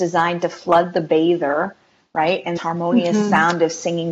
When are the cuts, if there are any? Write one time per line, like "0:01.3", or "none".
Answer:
0:02.6